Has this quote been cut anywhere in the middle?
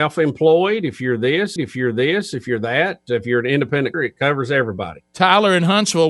yes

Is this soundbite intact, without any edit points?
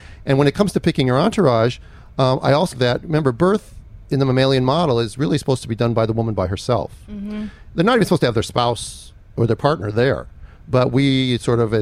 no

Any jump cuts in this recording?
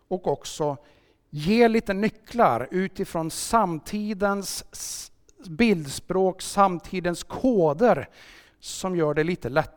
no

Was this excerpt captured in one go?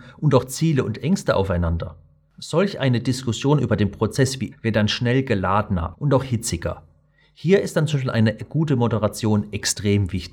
no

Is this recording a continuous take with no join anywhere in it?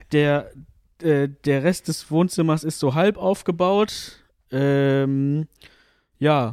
yes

